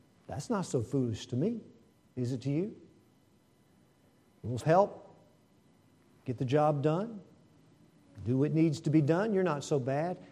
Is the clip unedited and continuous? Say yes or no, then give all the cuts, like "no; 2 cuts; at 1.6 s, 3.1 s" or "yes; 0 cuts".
no; 1 cut; at 4.6 s